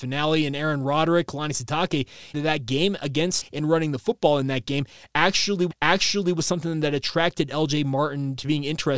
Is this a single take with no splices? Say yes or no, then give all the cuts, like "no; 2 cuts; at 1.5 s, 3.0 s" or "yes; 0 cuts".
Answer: no; 4 cuts; at 1.3 s, 2.3 s, 3.4 s, 5.7 s